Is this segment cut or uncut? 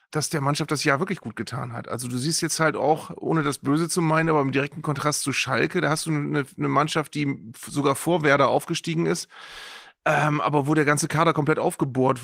uncut